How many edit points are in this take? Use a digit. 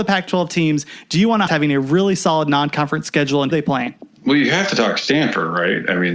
3